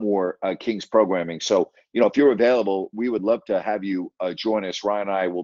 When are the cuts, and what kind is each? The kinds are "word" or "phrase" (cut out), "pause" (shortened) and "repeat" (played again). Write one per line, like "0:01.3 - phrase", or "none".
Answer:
none